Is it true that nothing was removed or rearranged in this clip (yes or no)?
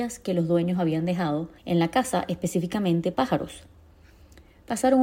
no